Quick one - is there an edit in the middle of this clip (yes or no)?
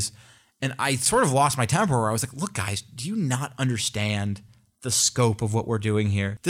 no